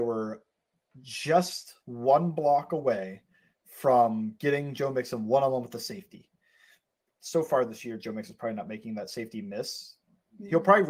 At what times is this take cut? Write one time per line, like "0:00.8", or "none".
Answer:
0:01.8
0:03.5